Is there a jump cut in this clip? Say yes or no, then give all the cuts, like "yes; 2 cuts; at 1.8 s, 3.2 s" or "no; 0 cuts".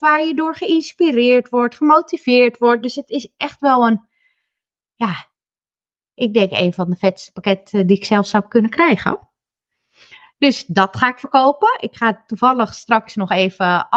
no; 0 cuts